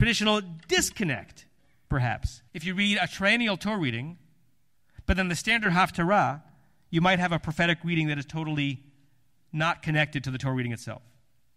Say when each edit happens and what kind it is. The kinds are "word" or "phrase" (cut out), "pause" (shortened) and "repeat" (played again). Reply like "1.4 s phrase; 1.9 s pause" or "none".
2.5 s pause